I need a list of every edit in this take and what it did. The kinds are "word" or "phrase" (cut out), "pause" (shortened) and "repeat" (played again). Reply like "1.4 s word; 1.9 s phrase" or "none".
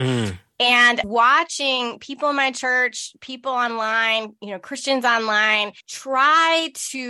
1.0 s phrase; 5.8 s pause